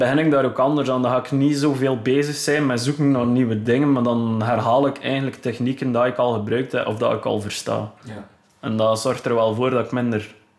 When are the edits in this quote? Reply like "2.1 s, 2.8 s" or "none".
none

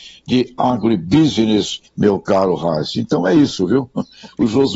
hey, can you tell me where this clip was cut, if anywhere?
1.9 s

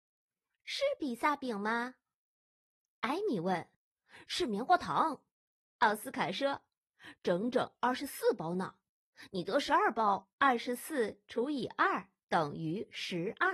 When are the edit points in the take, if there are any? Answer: 3.7 s, 5.3 s, 6.7 s, 10.4 s, 12.2 s

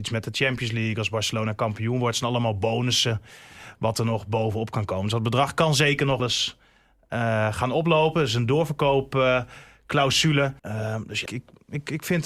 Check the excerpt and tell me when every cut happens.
6.2 s, 10.6 s, 11.3 s

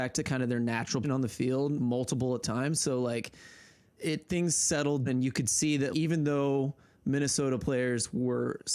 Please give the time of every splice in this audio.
1.0 s, 1.8 s, 2.4 s, 4.0 s, 5.1 s, 5.9 s

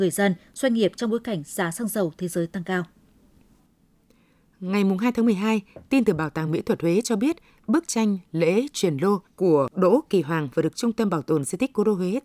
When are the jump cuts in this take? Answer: none

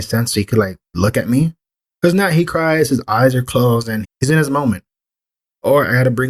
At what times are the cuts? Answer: 4.0 s

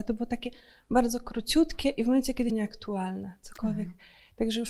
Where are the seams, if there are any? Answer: 2.5 s

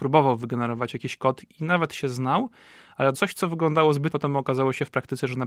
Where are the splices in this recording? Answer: 3.1 s, 4.1 s

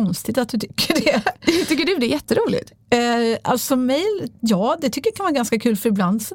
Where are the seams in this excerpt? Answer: none

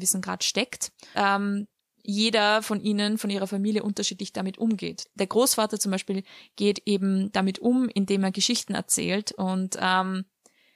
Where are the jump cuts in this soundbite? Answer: 1.1 s

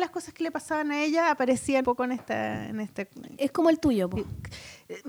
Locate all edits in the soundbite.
1.8 s

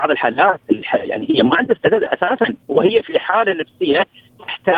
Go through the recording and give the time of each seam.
2.6 s

